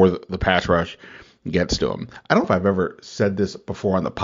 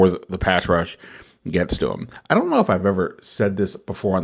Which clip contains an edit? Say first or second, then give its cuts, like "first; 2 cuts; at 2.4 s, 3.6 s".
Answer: first; 1 cut; at 2.4 s